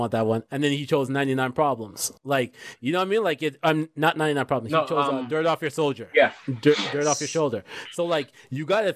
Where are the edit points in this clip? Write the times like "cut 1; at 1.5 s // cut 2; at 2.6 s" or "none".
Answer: cut 1; at 2.2 s

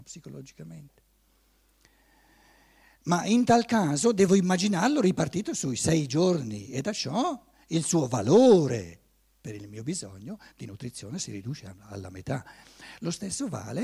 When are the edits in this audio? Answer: none

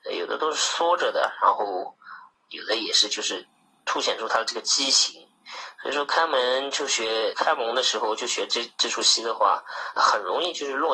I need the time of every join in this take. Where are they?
cut 1; at 7.3 s // cut 2; at 10.0 s

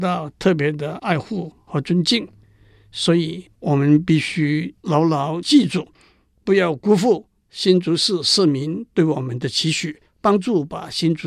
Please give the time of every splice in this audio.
cut 1; at 10.1 s

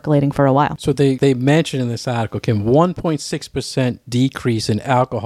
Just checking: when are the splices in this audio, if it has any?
none

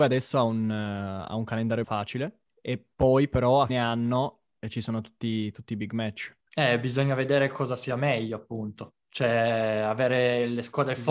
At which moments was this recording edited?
cut 1; at 1.8 s // cut 2; at 2.5 s // cut 3; at 3.7 s // cut 4; at 6.4 s // cut 5; at 9.0 s

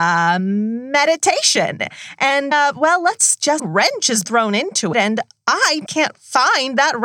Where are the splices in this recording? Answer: cut 1; at 2.5 s // cut 2; at 3.6 s // cut 3; at 4.2 s // cut 4; at 4.9 s // cut 5; at 5.9 s

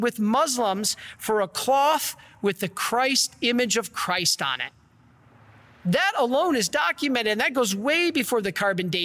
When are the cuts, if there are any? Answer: none

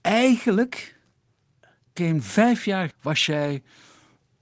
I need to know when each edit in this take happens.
cut 1; at 2.0 s // cut 2; at 2.9 s

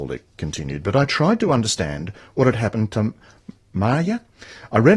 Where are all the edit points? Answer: none

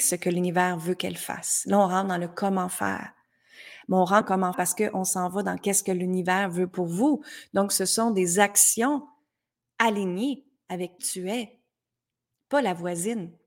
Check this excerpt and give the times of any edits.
cut 1; at 4.2 s // cut 2; at 4.5 s // cut 3; at 11.0 s

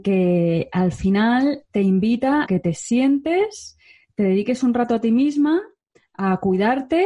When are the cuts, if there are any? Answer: cut 1; at 2.5 s

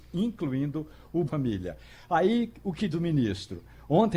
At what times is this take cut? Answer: cut 1; at 1.3 s // cut 2; at 2.9 s

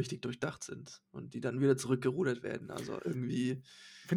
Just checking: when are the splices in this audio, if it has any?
none

